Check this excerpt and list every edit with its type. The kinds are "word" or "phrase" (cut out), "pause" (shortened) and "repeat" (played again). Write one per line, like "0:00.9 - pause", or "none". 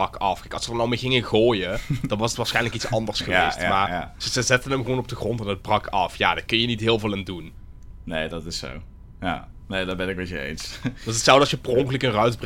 none